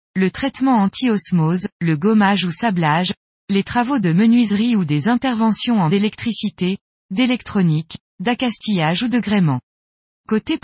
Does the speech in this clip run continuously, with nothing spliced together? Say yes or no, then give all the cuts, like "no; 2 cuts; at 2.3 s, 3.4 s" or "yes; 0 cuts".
no; 2 cuts; at 1.7 s, 5.9 s